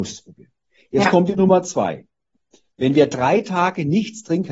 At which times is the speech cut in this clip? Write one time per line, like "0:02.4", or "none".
none